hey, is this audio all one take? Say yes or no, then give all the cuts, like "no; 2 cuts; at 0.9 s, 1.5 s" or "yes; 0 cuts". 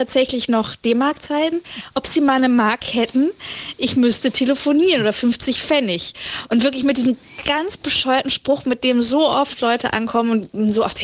yes; 0 cuts